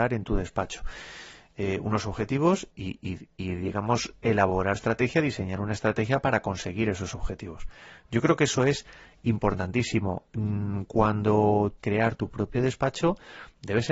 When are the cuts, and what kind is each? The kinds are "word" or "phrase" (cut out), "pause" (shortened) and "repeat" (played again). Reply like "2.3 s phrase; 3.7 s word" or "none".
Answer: 2.7 s word; 4.7 s word; 11.8 s phrase